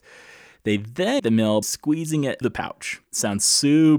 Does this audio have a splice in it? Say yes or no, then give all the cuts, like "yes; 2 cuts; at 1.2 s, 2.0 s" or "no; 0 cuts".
yes; 4 cuts; at 1.2 s, 1.6 s, 2.4 s, 3.1 s